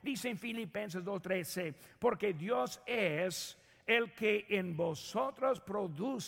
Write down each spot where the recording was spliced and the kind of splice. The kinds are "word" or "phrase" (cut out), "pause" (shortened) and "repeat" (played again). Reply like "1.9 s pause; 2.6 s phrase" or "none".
none